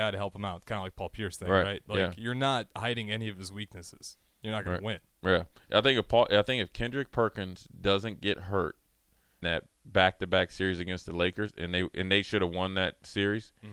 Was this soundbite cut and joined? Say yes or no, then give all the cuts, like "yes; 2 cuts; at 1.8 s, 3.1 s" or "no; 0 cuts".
yes; 1 cut; at 9.4 s